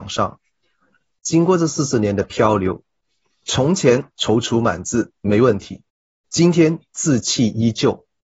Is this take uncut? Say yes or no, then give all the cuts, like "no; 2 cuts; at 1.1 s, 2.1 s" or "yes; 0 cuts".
yes; 0 cuts